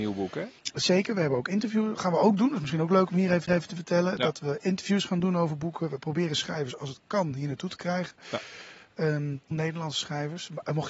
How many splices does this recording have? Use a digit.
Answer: 2